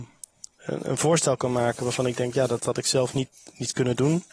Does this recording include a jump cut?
no; 0 cuts

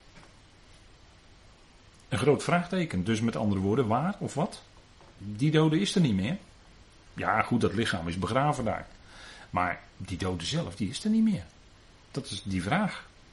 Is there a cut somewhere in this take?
yes; 1 cut; at 9.9 s

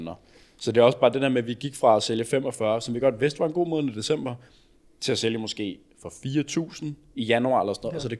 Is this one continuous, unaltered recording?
yes; 0 cuts

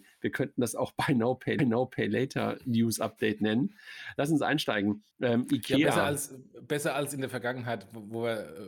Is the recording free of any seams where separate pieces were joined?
no; 2 cuts; at 1.6 s, 5.1 s

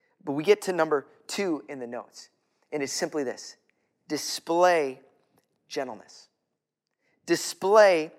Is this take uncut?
yes; 0 cuts

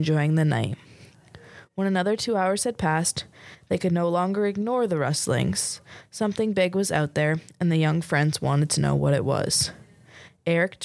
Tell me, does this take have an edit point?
no; 0 cuts

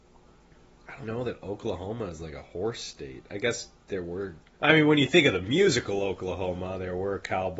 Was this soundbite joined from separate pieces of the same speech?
yes; 2 cuts; at 1.0 s, 4.5 s

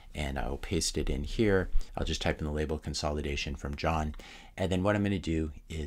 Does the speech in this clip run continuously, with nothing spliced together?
yes; 0 cuts

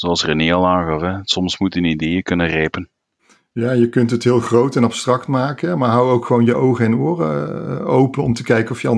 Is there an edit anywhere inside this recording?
no; 0 cuts

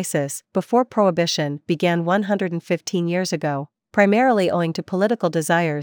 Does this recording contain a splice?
no; 0 cuts

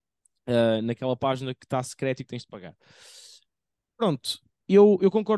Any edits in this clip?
no; 0 cuts

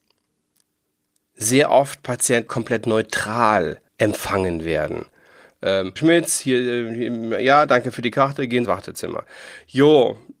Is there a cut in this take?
yes; 4 cuts; at 2.5 s, 3.9 s, 6.0 s, 8.6 s

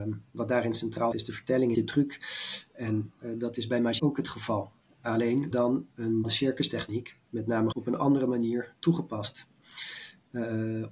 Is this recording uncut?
no; 6 cuts; at 1.1 s, 1.7 s, 4.0 s, 5.5 s, 6.2 s, 7.7 s

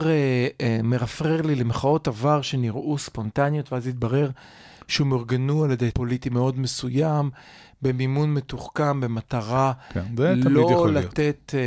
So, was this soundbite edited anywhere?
yes; 1 cut; at 5.9 s

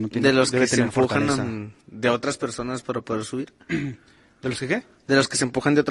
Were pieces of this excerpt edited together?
yes; 1 cut; at 1.8 s

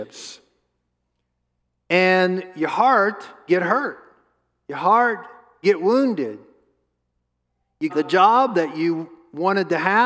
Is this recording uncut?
no; 3 cuts; at 3.5 s, 5.6 s, 7.9 s

